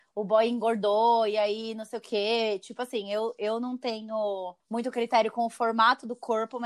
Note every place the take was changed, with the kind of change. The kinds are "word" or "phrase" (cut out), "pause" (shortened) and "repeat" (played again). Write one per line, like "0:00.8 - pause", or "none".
0:04.6 - pause